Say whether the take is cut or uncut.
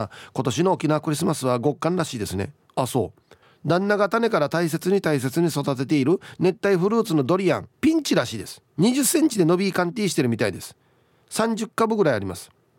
cut